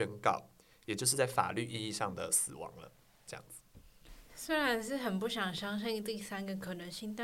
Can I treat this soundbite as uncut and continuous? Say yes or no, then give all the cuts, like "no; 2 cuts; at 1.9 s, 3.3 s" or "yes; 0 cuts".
yes; 0 cuts